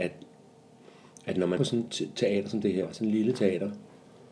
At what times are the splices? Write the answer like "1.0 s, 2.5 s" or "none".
1.6 s